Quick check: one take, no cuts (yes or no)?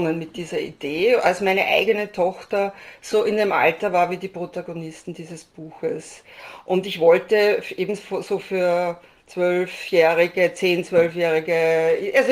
yes